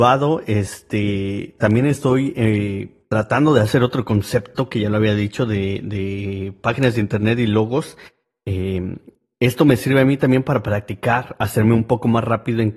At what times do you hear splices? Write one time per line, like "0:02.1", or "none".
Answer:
none